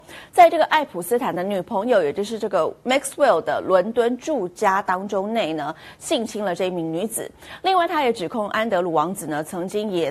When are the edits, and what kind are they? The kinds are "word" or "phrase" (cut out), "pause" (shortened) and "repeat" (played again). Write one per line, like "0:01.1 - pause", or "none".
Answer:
none